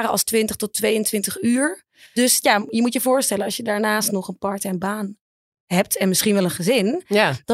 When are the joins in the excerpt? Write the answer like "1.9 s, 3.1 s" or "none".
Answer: none